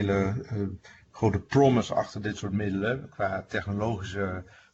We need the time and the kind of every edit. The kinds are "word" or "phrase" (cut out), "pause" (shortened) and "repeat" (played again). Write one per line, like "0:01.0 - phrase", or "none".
none